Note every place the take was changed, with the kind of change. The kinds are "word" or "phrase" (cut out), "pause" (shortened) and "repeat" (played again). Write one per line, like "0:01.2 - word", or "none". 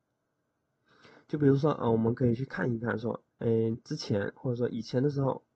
0:03.3 - pause